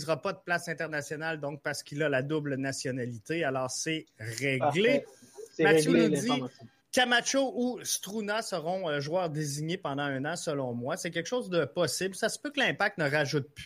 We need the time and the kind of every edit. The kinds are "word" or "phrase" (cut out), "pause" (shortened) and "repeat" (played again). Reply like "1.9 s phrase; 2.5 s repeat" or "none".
6.8 s pause